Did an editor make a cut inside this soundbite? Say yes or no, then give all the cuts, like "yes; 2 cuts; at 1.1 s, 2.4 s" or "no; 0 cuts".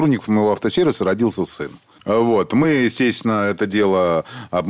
no; 0 cuts